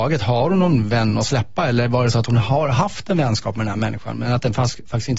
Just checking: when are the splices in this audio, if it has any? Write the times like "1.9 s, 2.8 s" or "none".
none